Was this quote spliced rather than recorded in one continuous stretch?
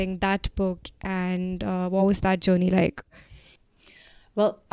no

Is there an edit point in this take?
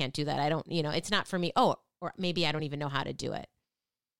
no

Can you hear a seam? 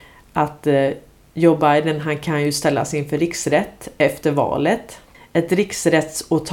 no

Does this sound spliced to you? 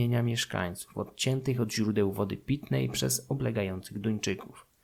no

